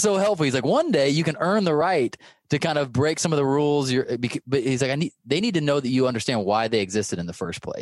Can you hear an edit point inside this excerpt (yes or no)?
no